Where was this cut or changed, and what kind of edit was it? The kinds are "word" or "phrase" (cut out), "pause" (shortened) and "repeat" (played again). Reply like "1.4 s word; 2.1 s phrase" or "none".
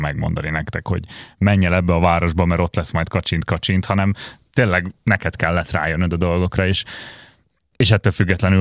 none